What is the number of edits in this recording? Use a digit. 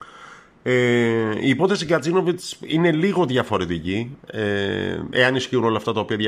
0